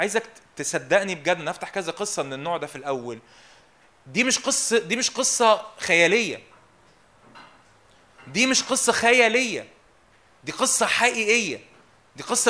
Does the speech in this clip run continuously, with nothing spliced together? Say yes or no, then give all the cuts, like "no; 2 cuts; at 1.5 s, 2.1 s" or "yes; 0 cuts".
yes; 0 cuts